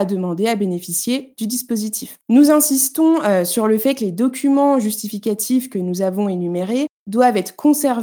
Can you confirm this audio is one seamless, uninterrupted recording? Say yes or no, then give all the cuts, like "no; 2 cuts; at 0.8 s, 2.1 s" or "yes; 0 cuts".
no; 1 cut; at 2.2 s